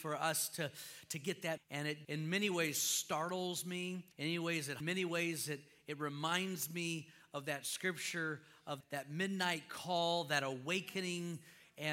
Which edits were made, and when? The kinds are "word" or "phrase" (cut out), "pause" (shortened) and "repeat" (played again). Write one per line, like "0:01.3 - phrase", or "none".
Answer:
0:01.6 - phrase
0:02.0 - word
0:04.1 - pause
0:04.8 - phrase
0:08.8 - word